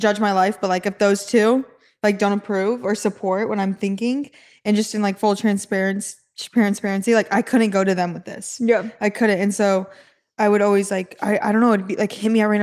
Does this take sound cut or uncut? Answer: uncut